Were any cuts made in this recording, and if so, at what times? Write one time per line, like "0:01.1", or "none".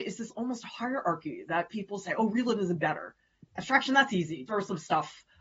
0:04.5